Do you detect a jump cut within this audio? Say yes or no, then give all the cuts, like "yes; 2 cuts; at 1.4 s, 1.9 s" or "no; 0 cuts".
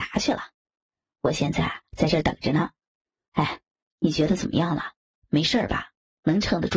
no; 0 cuts